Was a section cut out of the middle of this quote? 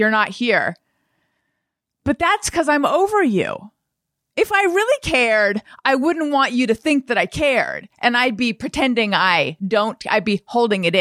no; 0 cuts

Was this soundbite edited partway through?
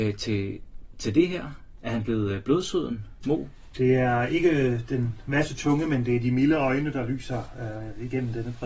no; 0 cuts

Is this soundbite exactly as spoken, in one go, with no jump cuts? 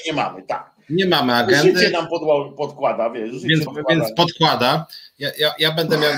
no; 1 cut; at 3.7 s

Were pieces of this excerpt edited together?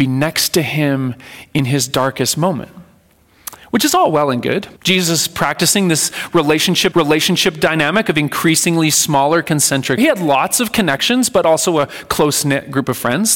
yes; 3 cuts; at 4.8 s, 6.9 s, 10.0 s

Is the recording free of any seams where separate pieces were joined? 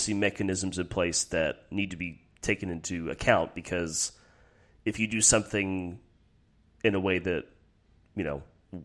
yes; 0 cuts

